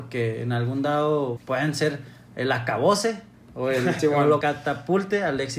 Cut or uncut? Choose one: cut